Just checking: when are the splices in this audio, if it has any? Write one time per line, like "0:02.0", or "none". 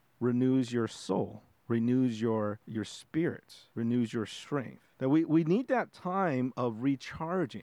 0:02.6
0:03.7
0:04.9